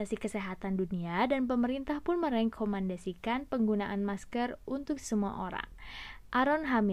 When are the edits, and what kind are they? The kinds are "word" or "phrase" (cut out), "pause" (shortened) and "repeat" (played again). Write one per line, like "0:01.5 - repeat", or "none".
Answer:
none